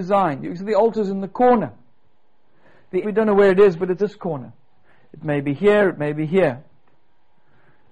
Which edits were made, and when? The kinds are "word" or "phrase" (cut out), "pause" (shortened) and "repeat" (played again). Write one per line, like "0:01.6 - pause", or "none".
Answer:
0:03.0 - word
0:04.0 - phrase